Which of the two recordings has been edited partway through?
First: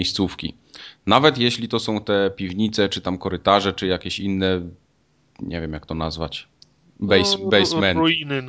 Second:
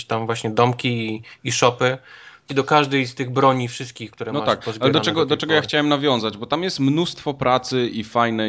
second; 1 cut; at 2.5 s

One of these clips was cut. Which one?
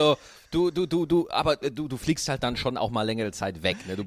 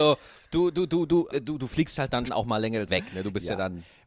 second; 3 cuts; at 1.3 s, 2.3 s, 2.9 s

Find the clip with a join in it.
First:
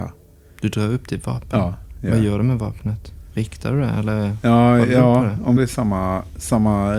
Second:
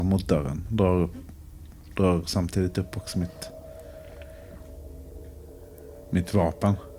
first; 1 cut; at 5.6 s

